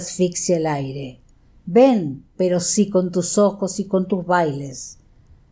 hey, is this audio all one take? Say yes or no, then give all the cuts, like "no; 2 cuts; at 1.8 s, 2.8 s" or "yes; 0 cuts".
no; 1 cut; at 2.3 s